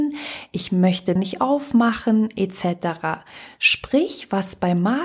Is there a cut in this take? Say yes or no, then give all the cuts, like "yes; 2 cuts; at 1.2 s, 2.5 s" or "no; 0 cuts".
yes; 1 cut; at 1.2 s